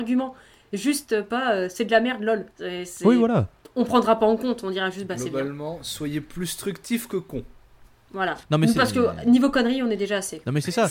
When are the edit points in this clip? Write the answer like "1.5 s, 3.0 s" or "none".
2.5 s, 8.4 s